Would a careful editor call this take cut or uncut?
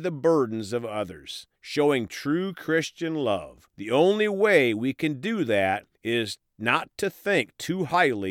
cut